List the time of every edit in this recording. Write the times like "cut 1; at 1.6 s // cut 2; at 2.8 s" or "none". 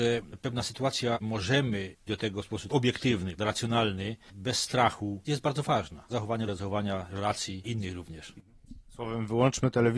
cut 1; at 1.2 s // cut 2; at 2.1 s // cut 3; at 2.7 s // cut 4; at 3.4 s // cut 5; at 5.3 s // cut 6; at 6.1 s // cut 7; at 6.5 s // cut 8; at 7.1 s // cut 9; at 7.6 s